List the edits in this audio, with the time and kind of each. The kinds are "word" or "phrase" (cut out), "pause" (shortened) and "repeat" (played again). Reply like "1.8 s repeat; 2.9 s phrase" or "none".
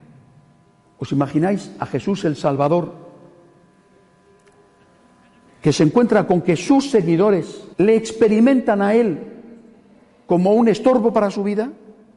7.7 s pause